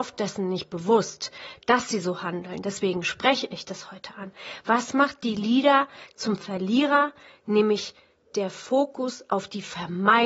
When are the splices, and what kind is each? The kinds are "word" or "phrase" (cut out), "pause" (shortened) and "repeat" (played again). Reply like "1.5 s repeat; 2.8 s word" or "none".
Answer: none